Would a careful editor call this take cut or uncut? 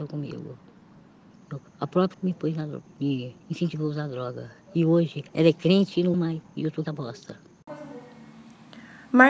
cut